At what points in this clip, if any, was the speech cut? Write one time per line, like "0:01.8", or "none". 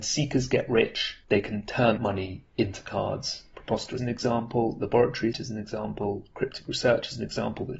0:01.2
0:02.0
0:04.0
0:05.3